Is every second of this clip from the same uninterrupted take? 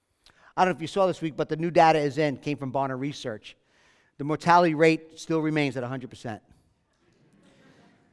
yes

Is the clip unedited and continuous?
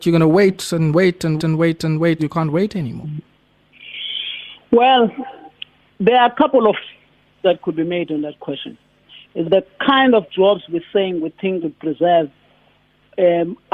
no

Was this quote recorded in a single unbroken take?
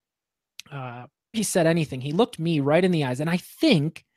no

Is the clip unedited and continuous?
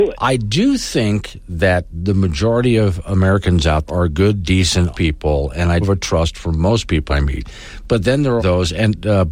no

